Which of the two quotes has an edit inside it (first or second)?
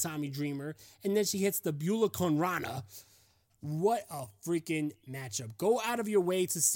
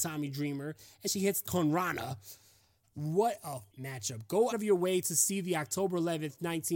second